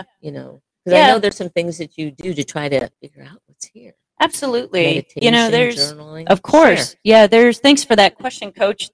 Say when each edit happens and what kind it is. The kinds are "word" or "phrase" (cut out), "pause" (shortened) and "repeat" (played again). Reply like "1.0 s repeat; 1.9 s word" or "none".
2.9 s pause